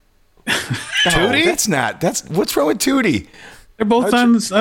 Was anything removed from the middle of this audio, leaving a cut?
no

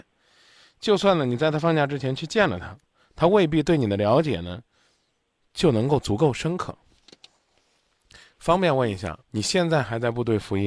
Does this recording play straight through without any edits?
no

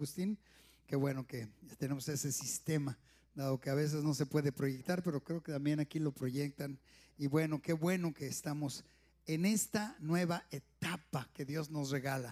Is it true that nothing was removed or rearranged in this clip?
yes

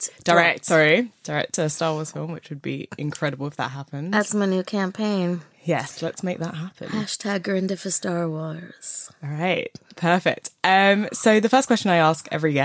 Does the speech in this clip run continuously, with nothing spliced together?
yes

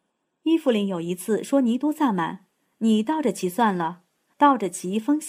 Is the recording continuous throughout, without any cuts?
yes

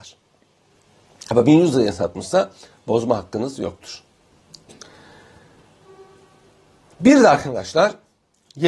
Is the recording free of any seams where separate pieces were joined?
yes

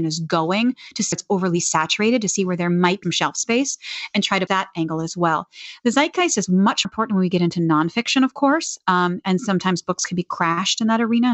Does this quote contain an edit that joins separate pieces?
yes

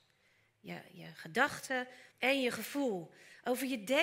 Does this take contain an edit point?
yes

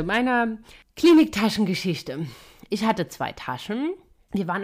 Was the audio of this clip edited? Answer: no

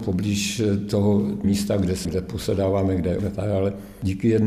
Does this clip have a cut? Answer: yes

